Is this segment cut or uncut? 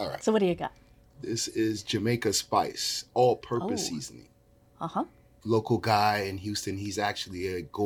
uncut